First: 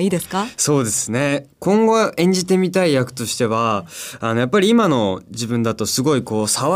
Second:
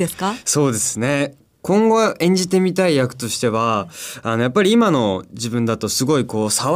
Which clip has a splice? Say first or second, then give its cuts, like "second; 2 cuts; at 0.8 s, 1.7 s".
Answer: first; 1 cut; at 1.5 s